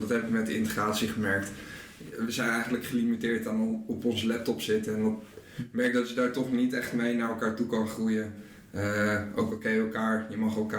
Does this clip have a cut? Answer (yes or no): no